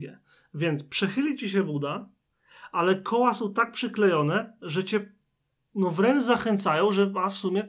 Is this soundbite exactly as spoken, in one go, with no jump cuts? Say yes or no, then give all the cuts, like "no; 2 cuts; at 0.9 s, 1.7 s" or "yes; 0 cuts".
yes; 0 cuts